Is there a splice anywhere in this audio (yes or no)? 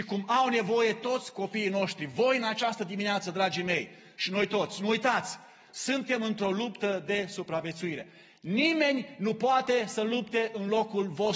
no